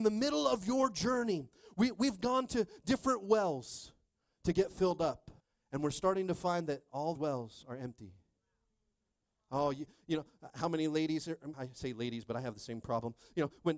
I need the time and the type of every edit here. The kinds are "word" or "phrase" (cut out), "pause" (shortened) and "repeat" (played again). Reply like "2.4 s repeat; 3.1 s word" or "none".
5.4 s pause; 7.1 s word; 11.5 s word